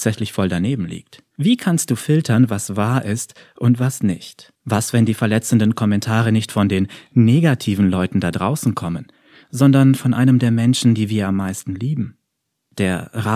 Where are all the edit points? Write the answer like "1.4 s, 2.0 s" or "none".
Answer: 1.3 s, 4.6 s